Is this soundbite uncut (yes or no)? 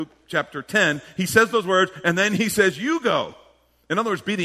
yes